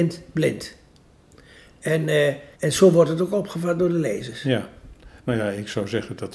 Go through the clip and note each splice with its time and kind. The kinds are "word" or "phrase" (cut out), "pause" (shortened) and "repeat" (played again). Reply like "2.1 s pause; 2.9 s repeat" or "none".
2.5 s pause; 5.2 s pause

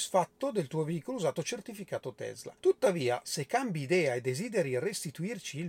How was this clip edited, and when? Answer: 2.6 s pause

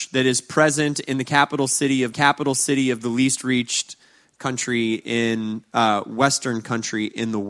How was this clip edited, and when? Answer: 2.1 s repeat

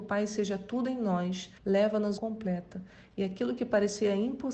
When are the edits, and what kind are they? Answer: 1.6 s pause; 2.2 s phrase

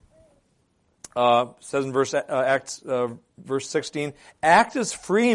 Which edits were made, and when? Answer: none

